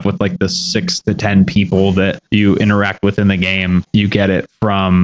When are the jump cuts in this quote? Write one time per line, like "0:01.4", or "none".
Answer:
0:02.3

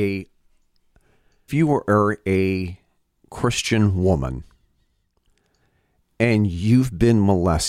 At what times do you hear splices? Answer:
0:01.5
0:03.1

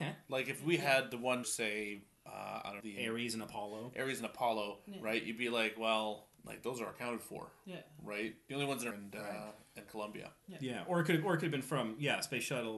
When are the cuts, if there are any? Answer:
0:01.4
0:02.8
0:06.3
0:08.9

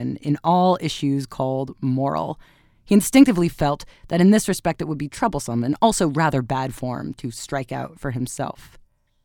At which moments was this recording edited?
none

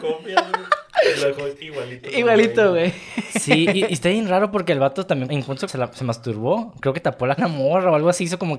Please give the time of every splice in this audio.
0:05.3
0:05.7
0:07.4

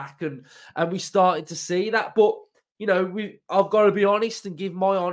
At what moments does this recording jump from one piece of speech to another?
none

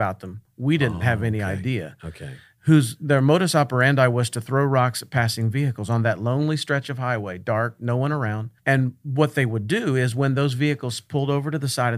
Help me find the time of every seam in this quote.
0:08.6

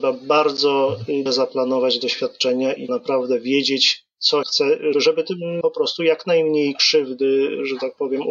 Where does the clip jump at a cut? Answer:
0:01.3
0:02.9
0:04.4
0:04.9
0:05.6

